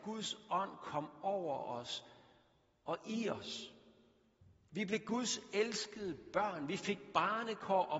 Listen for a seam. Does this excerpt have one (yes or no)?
no